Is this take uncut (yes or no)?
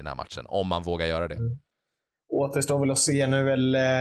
yes